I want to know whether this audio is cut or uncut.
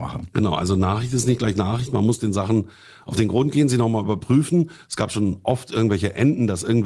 uncut